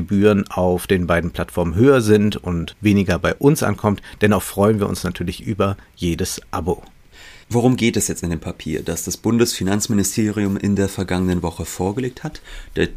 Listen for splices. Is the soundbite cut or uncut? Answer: cut